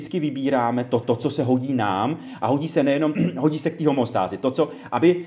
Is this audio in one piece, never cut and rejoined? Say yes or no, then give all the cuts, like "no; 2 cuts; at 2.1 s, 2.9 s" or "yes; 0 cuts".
no; 2 cuts; at 1.0 s, 3.1 s